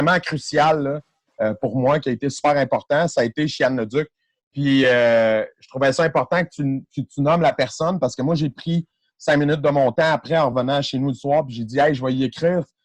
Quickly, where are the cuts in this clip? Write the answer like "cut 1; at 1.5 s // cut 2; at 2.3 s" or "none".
none